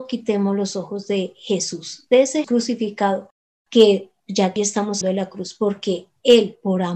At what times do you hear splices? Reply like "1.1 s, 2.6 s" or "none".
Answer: 2.4 s, 4.6 s, 5.0 s